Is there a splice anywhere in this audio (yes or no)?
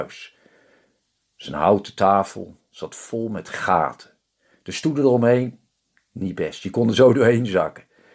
no